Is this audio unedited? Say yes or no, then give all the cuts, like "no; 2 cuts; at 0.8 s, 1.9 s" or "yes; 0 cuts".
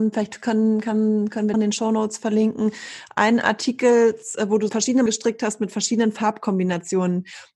no; 3 cuts; at 1.5 s, 4.7 s, 5.1 s